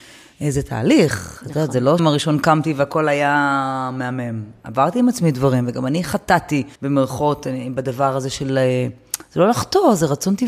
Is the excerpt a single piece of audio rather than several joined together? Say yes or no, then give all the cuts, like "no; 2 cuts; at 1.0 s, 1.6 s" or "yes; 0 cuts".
no; 2 cuts; at 2.0 s, 6.8 s